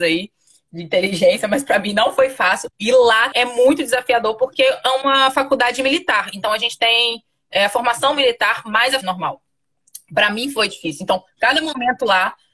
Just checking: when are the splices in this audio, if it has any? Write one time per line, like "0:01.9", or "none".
0:02.7
0:03.3
0:09.0